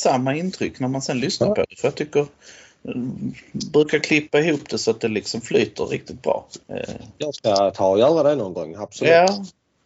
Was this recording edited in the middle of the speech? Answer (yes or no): yes